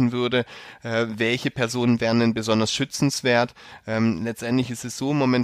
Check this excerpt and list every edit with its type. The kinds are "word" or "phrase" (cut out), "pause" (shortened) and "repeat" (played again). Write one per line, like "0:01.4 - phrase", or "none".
none